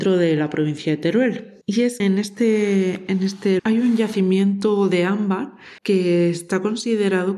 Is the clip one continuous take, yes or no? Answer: no